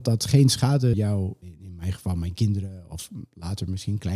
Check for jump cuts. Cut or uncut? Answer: cut